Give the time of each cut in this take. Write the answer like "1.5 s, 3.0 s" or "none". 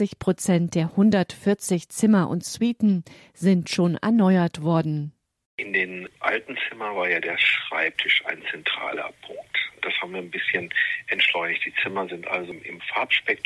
none